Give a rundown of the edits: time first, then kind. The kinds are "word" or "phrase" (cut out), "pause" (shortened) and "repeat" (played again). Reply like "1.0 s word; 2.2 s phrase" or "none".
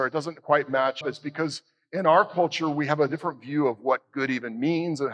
1.0 s word